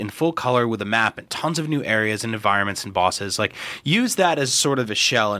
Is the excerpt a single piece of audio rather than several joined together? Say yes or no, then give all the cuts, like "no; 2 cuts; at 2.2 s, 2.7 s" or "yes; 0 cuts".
yes; 0 cuts